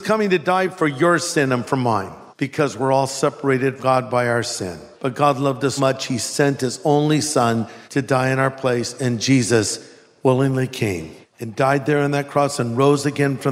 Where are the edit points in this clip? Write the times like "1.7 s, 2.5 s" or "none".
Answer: 2.3 s, 3.8 s, 4.9 s, 5.8 s, 7.8 s, 11.2 s